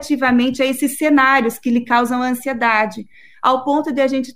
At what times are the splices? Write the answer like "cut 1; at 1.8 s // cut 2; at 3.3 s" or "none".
none